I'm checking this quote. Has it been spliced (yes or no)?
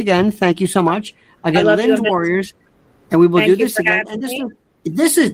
no